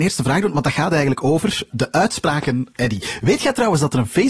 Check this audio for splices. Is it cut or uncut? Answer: cut